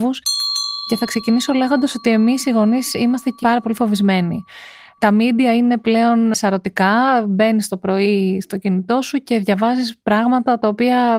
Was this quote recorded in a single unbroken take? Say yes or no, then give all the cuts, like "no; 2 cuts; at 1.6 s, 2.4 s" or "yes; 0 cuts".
no; 1 cut; at 3.4 s